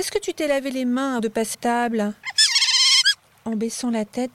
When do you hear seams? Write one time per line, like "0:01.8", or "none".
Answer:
0:01.2
0:01.5